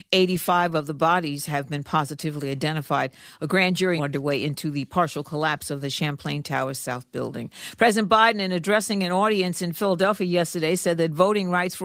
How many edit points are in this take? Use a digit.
1